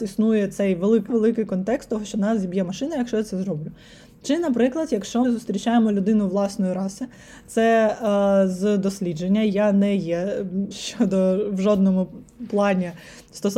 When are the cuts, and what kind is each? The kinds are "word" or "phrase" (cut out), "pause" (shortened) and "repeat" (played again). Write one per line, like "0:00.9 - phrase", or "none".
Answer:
0:01.1 - word
0:05.2 - word
0:10.7 - word

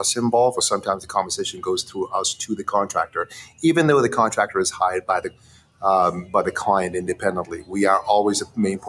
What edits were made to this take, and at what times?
none

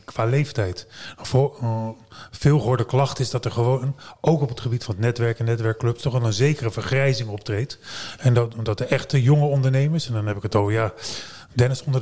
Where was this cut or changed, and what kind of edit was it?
none

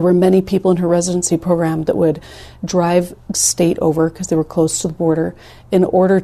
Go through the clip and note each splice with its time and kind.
0:03.3 - phrase

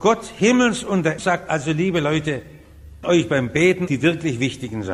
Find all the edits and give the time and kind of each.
0:01.2 - word
0:03.0 - word
0:03.9 - word

